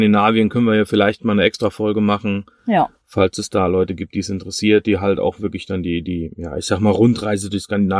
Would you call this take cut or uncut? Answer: uncut